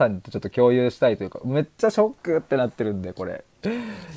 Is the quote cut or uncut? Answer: cut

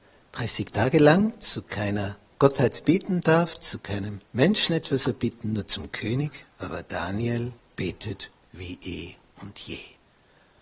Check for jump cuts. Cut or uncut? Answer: cut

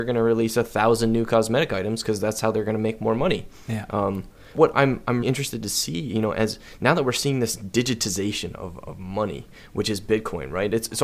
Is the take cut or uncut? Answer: cut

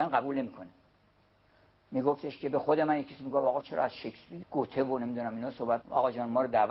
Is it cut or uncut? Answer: cut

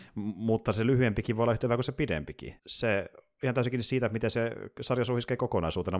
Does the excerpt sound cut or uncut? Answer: cut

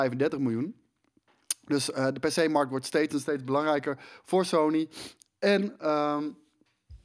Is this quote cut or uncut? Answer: uncut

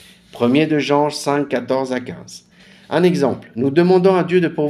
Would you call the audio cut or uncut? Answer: uncut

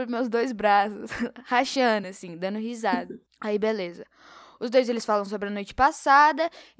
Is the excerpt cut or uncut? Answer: uncut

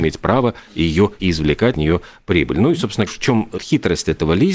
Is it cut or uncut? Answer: cut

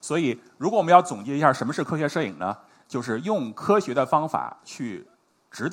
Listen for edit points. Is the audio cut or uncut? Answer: uncut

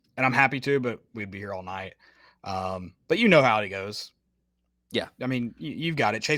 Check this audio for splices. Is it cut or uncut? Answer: uncut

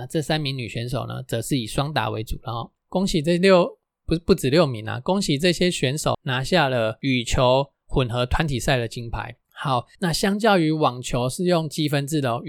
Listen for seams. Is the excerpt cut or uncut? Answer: cut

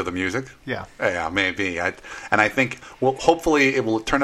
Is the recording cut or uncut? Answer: uncut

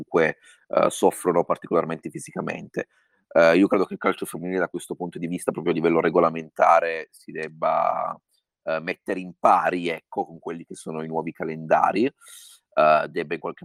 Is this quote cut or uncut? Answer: uncut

